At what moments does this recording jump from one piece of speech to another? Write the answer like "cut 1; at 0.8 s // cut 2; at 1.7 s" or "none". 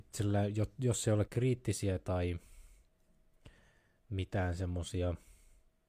cut 1; at 1.3 s